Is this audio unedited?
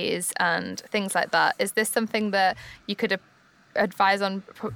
yes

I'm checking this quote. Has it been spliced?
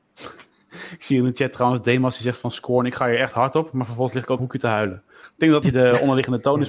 yes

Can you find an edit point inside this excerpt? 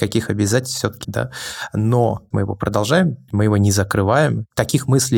yes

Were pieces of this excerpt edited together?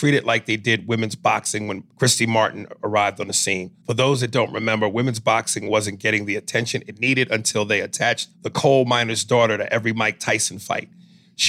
yes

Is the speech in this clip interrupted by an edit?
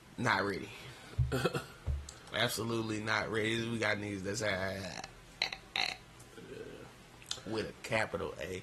no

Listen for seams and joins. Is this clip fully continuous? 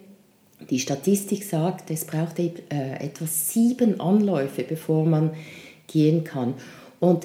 yes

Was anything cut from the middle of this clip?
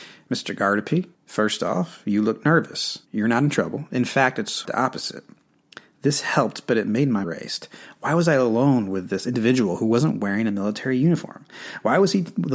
yes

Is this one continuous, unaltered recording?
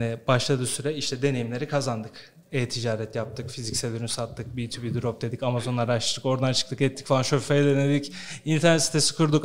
yes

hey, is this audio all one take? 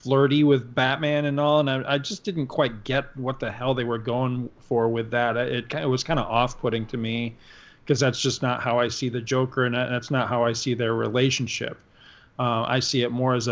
yes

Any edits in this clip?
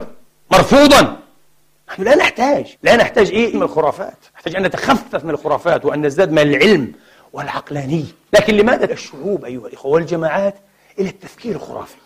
yes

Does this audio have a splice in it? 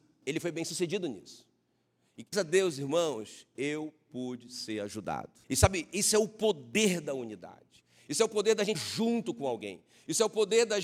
yes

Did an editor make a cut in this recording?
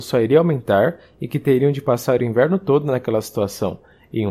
no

